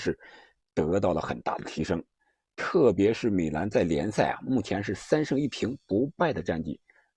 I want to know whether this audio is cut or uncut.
uncut